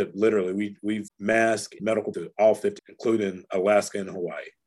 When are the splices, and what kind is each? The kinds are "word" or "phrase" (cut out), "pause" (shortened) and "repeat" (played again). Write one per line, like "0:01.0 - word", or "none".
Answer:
0:01.1 - word
0:01.8 - word
0:02.1 - word
0:02.8 - word